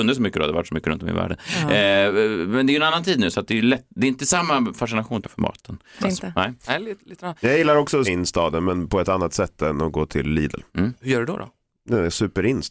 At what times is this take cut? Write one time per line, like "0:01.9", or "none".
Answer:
0:05.2
0:06.0
0:08.0
0:10.7